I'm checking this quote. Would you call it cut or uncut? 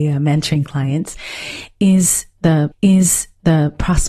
cut